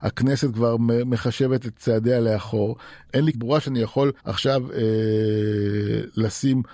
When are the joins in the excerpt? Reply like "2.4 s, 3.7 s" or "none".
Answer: 3.3 s, 4.2 s